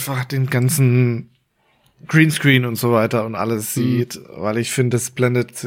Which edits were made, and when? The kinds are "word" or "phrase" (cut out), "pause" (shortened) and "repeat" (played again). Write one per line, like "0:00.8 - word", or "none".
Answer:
none